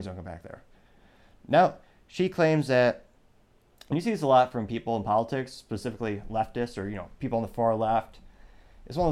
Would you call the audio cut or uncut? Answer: uncut